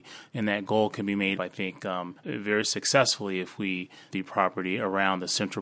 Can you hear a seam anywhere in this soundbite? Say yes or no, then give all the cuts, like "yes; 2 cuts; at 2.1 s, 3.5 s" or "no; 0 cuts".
yes; 3 cuts; at 1.4 s, 2.2 s, 4.1 s